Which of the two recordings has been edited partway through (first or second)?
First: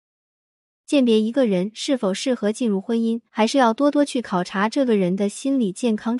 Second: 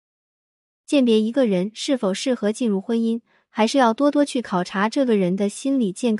first